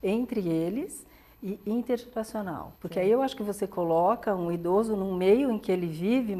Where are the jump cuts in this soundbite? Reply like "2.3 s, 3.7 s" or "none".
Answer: 2.8 s

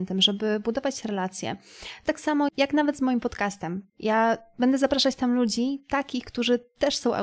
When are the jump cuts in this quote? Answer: 2.1 s, 2.5 s, 3.9 s

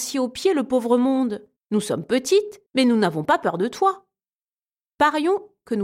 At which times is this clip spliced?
1.6 s, 2.7 s

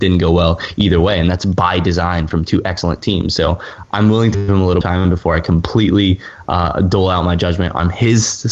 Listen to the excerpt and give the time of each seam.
4.3 s, 4.8 s

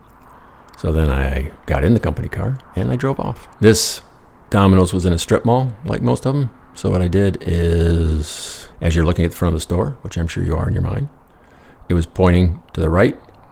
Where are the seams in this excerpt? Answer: 1.6 s, 2.6 s, 3.5 s, 8.7 s

